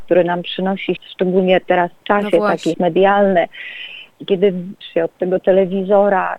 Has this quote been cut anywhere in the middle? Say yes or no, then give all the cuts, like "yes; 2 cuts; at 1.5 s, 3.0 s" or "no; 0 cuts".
yes; 4 cuts; at 1.0 s, 2.0 s, 2.7 s, 4.8 s